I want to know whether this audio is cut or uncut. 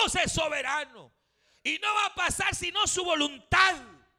uncut